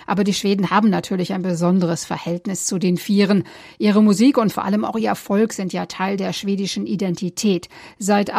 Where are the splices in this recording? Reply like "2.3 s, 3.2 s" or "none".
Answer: none